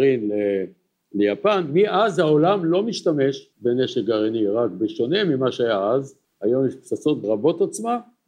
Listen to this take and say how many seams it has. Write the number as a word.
three